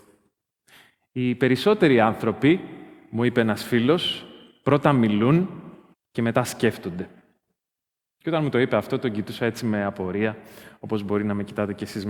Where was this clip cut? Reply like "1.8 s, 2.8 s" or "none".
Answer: 5.9 s